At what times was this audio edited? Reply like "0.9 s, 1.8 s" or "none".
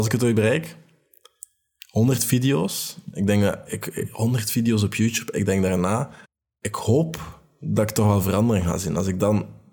6.2 s